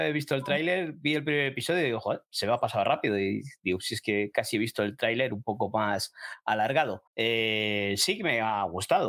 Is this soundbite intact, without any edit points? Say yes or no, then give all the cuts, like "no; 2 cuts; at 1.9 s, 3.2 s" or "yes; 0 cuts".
no; 1 cut; at 7.1 s